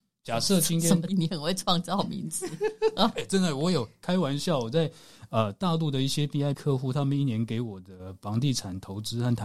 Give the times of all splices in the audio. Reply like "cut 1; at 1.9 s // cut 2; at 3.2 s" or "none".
cut 1; at 1.1 s // cut 2; at 6.5 s